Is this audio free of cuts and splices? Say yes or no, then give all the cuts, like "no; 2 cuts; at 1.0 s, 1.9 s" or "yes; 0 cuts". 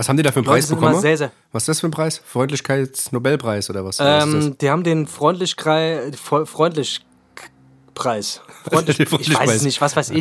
yes; 0 cuts